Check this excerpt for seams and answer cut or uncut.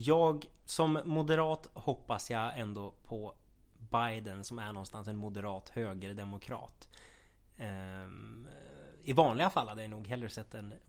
uncut